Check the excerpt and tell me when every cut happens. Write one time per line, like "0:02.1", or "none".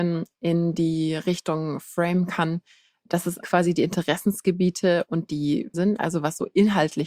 0:03.4
0:05.7

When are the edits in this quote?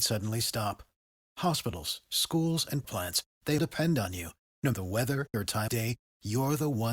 0:02.0
0:02.8
0:03.6
0:04.7
0:05.3
0:05.7

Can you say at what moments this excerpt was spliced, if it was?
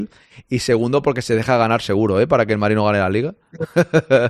none

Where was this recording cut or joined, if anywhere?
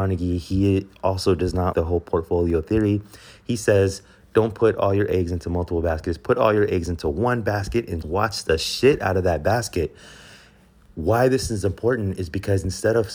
0:01.7
0:08.0

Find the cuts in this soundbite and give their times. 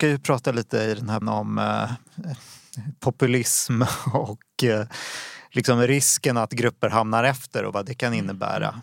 0:01.2

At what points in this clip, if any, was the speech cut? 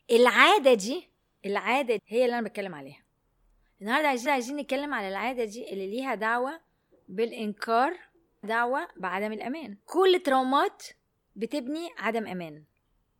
0:02.0
0:04.3
0:08.4
0:09.8

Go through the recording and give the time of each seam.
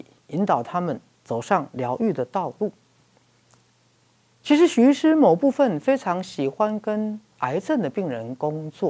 0:07.3

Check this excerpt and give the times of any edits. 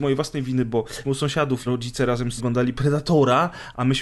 0:01.0
0:01.6
0:02.4

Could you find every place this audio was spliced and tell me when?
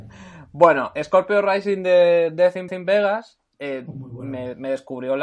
0:01.0
0:02.7

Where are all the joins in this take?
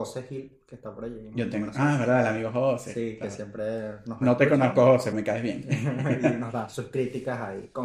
0:05.1

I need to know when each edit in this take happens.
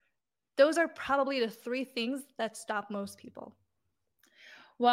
none

